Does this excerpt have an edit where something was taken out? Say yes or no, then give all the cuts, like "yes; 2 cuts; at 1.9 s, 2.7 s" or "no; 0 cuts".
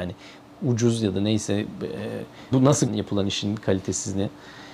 yes; 2 cuts; at 2.5 s, 2.9 s